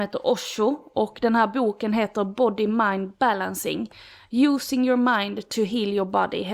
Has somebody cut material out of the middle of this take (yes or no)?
no